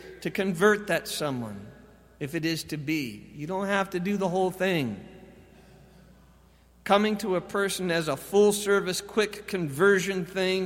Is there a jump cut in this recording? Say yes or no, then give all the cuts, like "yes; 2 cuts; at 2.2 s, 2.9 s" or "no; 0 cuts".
no; 0 cuts